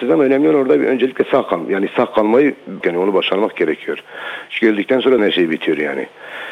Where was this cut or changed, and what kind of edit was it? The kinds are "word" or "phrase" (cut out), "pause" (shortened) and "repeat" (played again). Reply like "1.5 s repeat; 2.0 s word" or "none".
2.8 s word; 5.2 s word